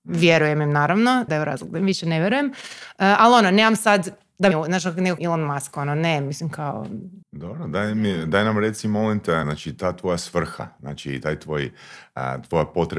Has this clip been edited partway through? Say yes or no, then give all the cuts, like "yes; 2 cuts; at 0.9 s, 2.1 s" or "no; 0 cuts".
yes; 5 cuts; at 1.3 s, 4.5 s, 5.2 s, 7.2 s, 9.4 s